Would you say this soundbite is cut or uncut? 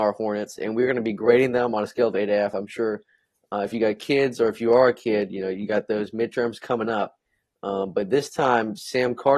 uncut